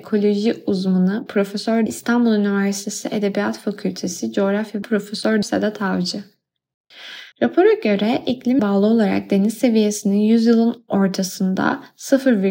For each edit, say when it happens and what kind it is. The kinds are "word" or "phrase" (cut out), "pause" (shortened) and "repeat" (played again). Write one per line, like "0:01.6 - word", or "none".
0:01.9 - phrase
0:04.8 - word
0:05.4 - word
0:07.3 - pause
0:08.6 - word